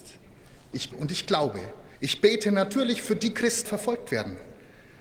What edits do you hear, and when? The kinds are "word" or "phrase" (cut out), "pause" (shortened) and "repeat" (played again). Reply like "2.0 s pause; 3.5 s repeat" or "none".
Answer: 0.9 s word; 1.9 s pause; 3.7 s phrase